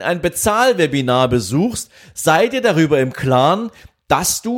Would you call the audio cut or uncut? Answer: uncut